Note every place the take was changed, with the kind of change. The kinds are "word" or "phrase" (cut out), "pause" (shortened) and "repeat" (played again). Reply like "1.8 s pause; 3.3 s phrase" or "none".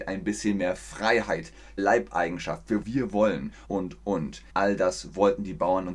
1.8 s word; 2.8 s phrase; 3.6 s word; 4.5 s pause